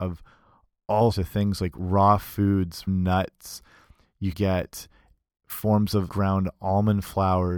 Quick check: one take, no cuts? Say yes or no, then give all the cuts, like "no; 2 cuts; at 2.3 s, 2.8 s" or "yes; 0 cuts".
no; 4 cuts; at 1.1 s, 2.9 s, 4.3 s, 6.1 s